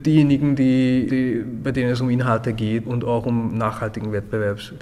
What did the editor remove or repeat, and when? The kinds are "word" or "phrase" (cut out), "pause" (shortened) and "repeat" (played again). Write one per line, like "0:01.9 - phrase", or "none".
0:01.1 - word
0:02.8 - word